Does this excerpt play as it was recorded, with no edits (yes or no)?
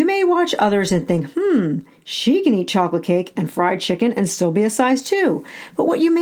yes